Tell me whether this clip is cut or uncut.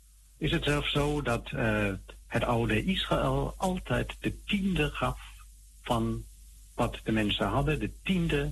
uncut